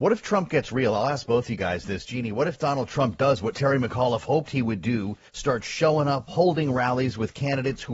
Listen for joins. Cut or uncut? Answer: cut